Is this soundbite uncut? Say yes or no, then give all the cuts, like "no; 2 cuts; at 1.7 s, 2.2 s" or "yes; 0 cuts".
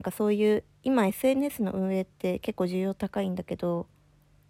yes; 0 cuts